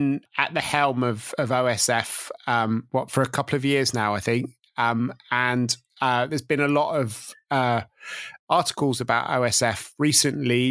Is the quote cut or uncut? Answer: uncut